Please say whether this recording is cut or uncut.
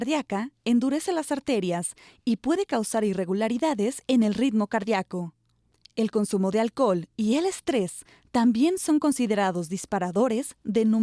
uncut